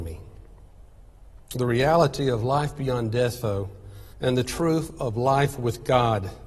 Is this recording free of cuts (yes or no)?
no